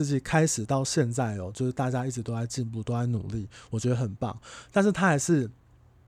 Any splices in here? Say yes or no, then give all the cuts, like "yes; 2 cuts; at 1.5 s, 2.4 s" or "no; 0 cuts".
no; 0 cuts